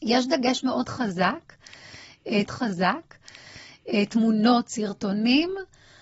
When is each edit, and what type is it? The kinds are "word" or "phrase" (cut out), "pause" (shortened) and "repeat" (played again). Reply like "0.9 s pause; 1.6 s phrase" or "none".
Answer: 2.5 s repeat